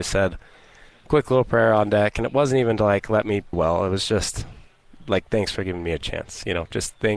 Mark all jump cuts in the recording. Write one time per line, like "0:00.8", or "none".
0:03.5